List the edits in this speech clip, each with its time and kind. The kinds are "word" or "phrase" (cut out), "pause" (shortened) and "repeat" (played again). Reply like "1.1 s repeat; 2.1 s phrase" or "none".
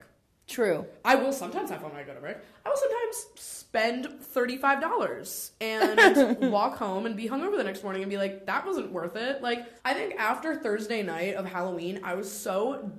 9.8 s pause